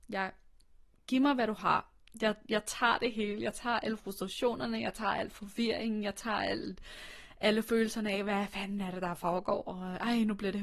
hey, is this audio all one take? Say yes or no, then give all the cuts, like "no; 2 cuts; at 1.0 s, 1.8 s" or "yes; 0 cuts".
yes; 0 cuts